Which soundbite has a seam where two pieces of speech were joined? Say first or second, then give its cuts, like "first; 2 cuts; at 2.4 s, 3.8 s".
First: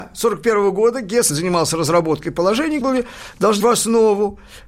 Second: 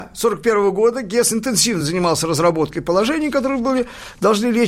first; 3 cuts; at 1.3 s, 2.8 s, 3.6 s